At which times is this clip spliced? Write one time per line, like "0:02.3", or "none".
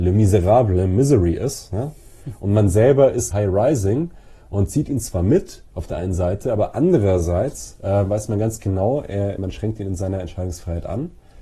0:03.3
0:05.7
0:09.4